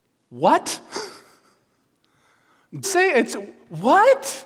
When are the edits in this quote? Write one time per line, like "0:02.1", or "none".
0:02.8